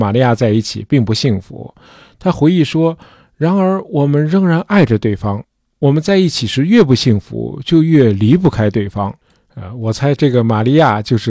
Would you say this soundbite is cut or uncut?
uncut